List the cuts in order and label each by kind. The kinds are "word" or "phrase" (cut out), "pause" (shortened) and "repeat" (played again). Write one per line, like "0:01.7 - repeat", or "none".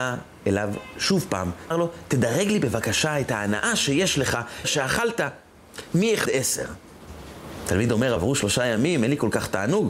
0:01.7 - word
0:04.6 - word
0:06.3 - word
0:08.2 - word